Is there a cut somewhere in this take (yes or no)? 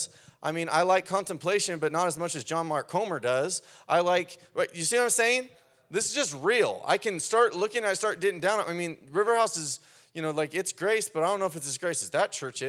no